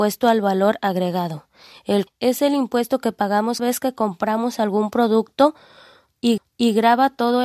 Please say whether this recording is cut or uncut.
cut